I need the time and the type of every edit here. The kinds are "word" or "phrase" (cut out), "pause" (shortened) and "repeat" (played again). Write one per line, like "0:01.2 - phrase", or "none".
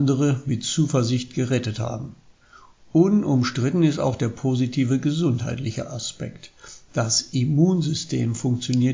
none